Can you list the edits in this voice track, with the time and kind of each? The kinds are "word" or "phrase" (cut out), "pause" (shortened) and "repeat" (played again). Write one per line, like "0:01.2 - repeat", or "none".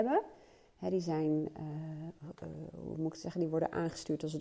none